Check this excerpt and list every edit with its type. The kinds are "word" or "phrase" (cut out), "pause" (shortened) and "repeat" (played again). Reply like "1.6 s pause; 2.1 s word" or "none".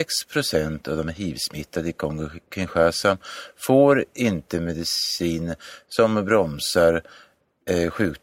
none